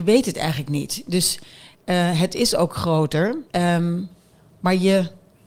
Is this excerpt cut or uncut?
cut